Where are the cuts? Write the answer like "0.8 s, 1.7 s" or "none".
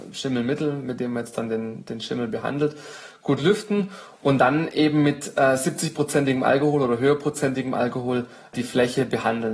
none